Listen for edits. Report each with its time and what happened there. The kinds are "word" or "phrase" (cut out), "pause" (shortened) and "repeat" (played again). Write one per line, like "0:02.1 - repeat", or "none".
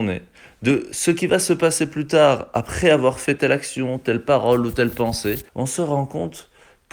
0:05.5 - pause